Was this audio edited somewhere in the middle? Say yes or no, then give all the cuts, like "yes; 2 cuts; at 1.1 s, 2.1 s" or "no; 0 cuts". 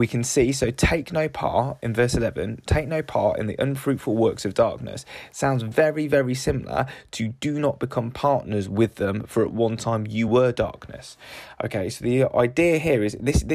no; 0 cuts